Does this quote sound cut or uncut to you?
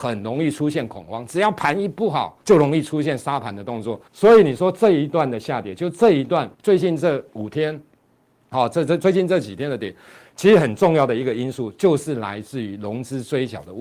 cut